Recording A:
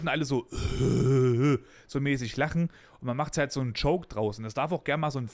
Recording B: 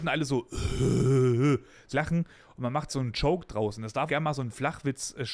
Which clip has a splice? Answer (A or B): B